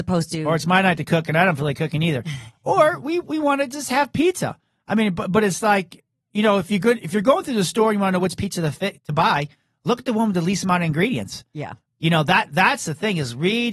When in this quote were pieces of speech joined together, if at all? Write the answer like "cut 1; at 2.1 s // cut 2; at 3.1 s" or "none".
none